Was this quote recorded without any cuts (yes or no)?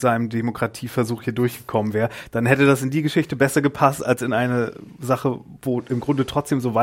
yes